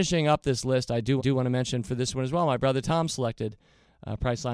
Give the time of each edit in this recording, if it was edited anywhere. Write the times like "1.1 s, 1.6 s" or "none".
1.2 s